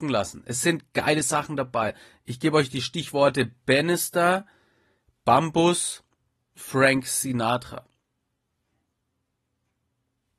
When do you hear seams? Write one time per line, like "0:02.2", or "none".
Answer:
0:06.6